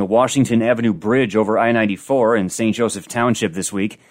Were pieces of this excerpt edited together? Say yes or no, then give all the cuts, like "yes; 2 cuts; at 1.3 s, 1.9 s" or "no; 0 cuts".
no; 0 cuts